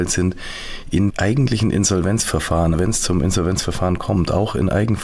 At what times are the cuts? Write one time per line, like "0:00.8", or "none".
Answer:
0:01.1
0:02.7